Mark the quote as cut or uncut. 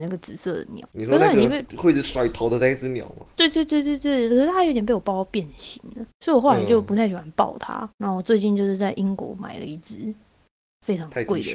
cut